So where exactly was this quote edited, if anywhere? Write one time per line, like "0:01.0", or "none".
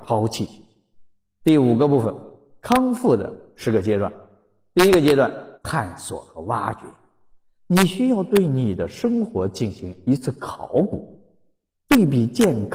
0:05.5